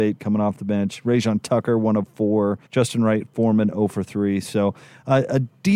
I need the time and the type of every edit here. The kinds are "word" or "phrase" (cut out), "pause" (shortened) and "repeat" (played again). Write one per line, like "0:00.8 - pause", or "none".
0:02.7 - pause